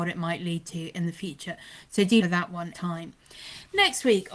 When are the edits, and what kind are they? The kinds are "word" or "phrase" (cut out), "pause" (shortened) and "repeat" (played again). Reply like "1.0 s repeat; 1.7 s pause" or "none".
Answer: 2.2 s phrase; 2.7 s phrase